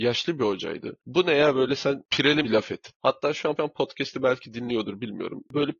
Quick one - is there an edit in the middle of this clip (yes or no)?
yes